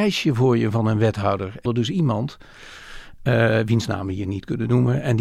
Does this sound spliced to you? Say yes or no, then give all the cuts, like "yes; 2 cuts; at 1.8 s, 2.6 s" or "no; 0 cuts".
yes; 1 cut; at 1.7 s